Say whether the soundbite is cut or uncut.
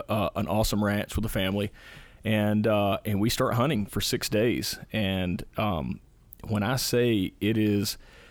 uncut